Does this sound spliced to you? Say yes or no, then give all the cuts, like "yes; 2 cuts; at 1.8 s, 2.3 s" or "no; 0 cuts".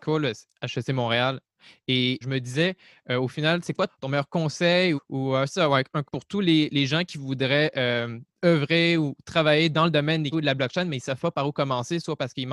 yes; 5 cuts; at 2.2 s, 3.9 s, 5.0 s, 6.0 s, 10.3 s